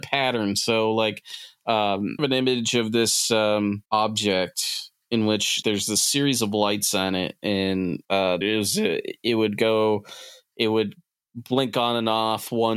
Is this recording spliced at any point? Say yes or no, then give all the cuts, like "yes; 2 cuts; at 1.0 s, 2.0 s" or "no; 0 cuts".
yes; 5 cuts; at 2.2 s, 3.9 s, 5.6 s, 8.0 s, 8.4 s